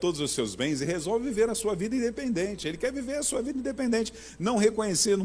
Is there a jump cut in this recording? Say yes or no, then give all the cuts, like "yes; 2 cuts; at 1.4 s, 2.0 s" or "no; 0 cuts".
no; 0 cuts